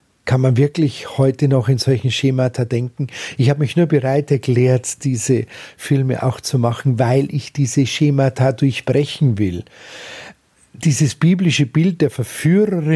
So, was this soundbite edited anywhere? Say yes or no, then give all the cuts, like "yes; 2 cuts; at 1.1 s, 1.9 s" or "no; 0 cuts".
no; 0 cuts